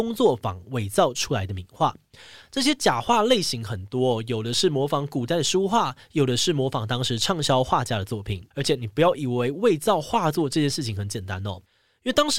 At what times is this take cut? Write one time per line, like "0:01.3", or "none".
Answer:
0:08.5